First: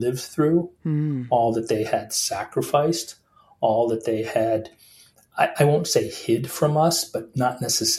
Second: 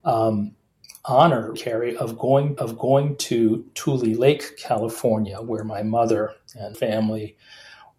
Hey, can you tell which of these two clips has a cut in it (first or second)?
second